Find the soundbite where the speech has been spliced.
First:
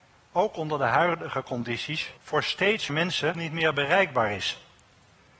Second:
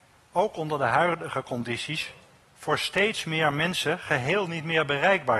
first; 3 cuts; at 2.2 s, 2.9 s, 3.3 s

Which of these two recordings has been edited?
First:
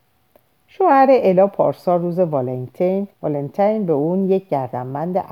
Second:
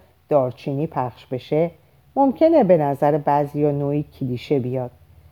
first; 1 cut; at 3.1 s

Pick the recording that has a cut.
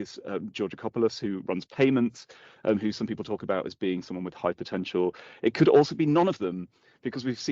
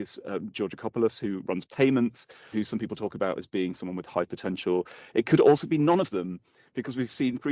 second; 1 cut; at 2.5 s

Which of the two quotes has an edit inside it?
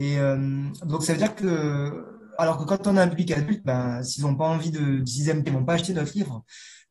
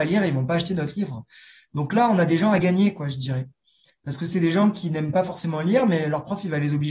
first; 2 cuts; at 2.4 s, 5.5 s

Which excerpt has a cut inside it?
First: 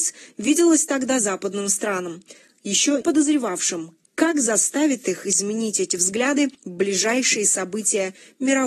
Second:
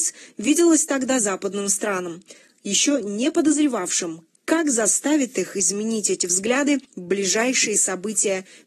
first; 1 cut; at 3.0 s

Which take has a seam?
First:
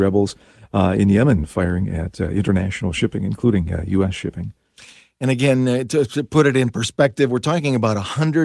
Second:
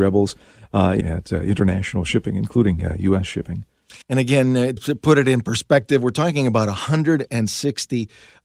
second; 3 cuts; at 1.0 s, 4.0 s, 4.8 s

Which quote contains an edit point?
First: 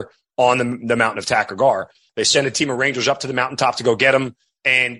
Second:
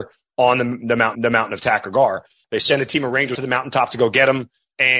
second; 2 cuts; at 1.1 s, 3.3 s

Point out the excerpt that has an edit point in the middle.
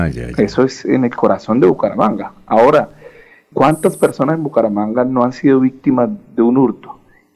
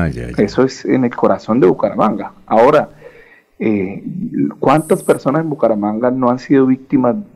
first; 1 cut; at 3.5 s

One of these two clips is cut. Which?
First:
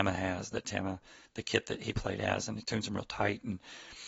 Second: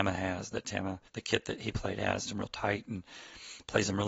second; 2 cuts; at 1.1 s, 2.3 s

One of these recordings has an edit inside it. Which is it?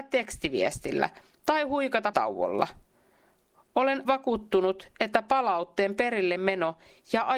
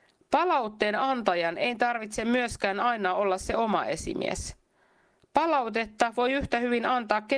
first; 2 cuts; at 2.1 s, 4.0 s

